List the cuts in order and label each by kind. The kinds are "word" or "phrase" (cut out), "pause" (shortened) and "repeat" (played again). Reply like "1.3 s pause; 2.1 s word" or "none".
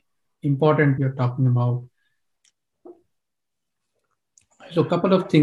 1.0 s word

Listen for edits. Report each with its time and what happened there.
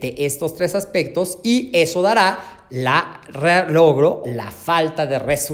4.2 s word

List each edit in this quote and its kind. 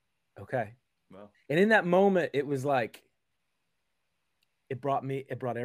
1.0 s pause; 1.3 s pause

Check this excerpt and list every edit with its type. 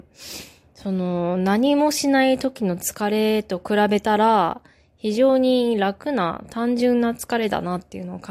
none

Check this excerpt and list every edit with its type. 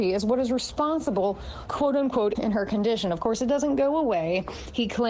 1.7 s phrase; 2.3 s word

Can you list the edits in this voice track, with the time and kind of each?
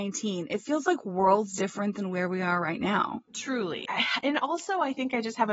none

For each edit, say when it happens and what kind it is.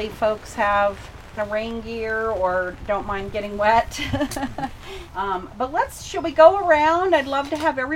1.4 s phrase

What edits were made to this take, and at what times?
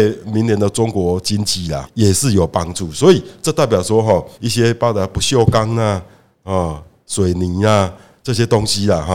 1.8 s word; 4.3 s pause

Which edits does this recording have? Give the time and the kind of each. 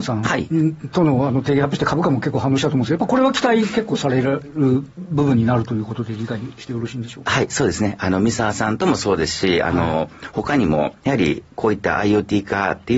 none

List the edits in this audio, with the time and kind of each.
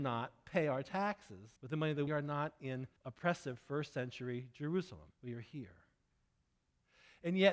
1.6 s pause; 2.1 s phrase; 3.0 s pause; 5.1 s pause

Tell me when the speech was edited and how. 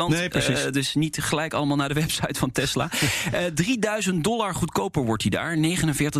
none

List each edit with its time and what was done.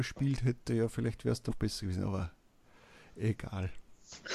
1.5 s word

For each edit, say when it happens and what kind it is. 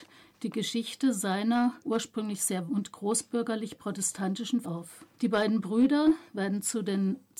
1.8 s pause; 2.7 s word; 4.6 s word; 5.1 s pause

